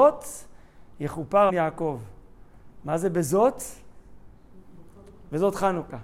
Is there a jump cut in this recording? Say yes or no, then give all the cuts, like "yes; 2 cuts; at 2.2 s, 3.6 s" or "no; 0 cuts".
yes; 1 cut; at 1.5 s